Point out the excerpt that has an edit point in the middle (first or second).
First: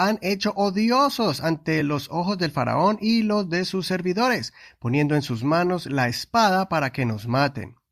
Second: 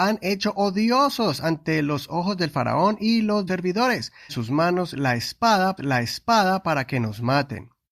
second